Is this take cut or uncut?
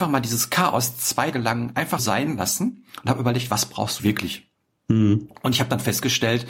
cut